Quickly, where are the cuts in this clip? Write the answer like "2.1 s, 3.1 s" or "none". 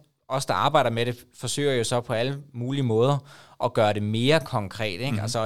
none